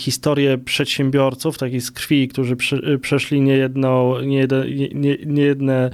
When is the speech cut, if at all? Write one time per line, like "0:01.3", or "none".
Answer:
0:02.3